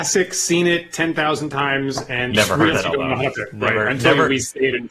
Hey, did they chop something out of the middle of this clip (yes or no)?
yes